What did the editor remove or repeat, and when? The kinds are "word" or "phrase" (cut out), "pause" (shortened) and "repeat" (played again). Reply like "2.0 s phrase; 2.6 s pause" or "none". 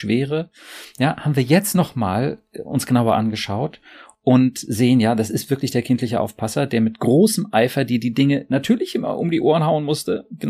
none